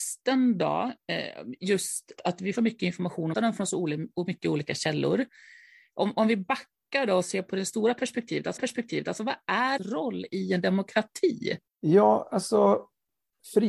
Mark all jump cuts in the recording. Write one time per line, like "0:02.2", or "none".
0:02.2
0:02.6
0:03.3
0:08.6
0:09.8
0:11.7